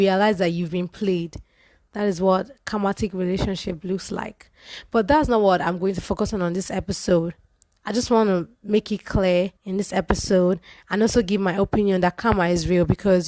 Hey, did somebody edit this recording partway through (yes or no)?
yes